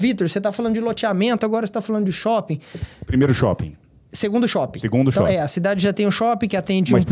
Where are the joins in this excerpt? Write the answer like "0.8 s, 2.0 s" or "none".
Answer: none